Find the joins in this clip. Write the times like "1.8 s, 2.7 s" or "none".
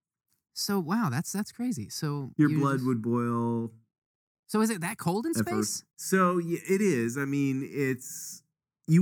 5.9 s